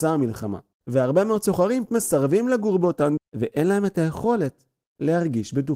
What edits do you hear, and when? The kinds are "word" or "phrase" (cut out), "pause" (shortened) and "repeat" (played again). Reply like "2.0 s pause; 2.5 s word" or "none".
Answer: 1.9 s word; 3.2 s word